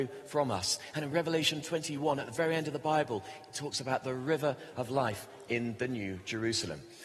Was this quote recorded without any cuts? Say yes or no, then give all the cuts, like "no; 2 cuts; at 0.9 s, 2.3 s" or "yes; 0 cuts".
yes; 0 cuts